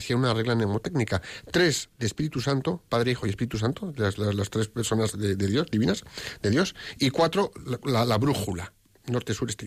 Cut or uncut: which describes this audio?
uncut